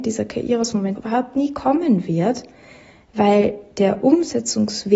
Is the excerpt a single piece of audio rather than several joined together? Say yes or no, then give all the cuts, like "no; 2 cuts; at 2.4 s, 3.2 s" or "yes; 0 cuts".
no; 1 cut; at 1.0 s